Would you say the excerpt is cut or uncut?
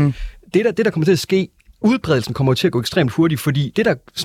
uncut